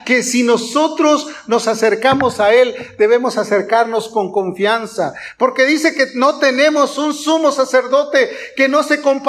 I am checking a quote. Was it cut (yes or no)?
no